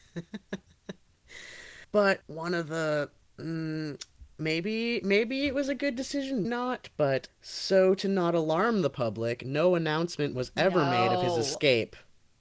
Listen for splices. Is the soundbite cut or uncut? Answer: cut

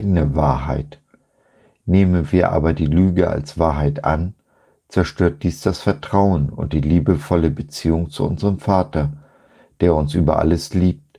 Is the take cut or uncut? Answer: uncut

